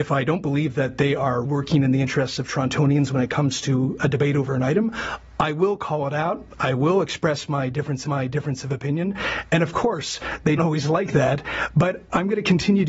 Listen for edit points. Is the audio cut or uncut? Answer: cut